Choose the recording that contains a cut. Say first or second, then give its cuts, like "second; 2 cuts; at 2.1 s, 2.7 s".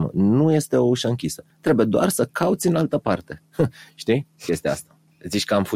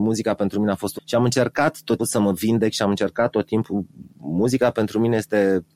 second; 2 cuts; at 1.0 s, 2.0 s